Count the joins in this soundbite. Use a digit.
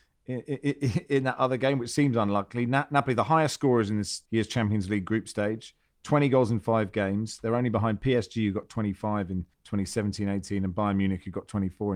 2